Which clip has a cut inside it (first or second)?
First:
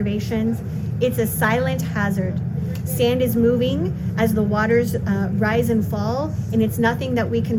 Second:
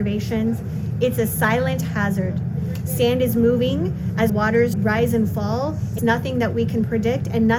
second